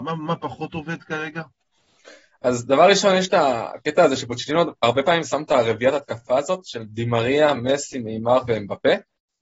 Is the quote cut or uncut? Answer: uncut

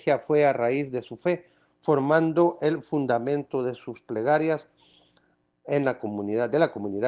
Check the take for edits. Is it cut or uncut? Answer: uncut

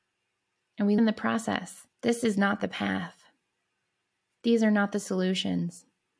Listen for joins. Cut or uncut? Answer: cut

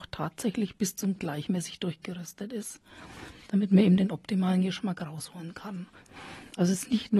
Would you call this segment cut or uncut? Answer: cut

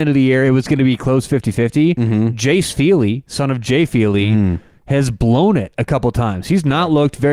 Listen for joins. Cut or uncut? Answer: uncut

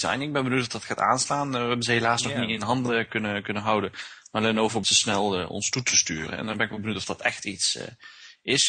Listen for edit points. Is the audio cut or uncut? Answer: cut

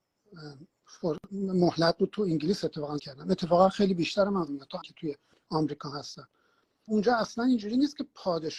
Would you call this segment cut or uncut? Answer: cut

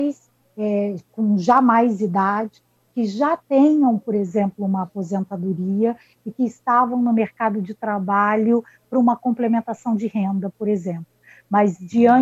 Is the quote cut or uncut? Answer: uncut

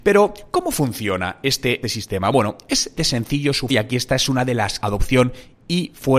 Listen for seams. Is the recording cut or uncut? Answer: cut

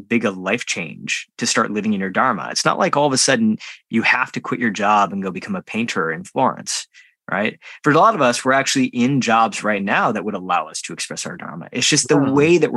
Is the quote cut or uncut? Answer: uncut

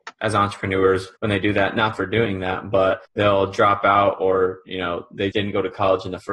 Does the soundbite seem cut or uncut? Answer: cut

